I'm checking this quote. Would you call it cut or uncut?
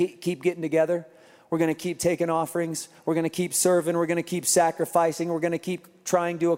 uncut